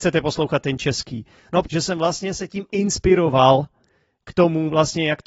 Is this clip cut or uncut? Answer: cut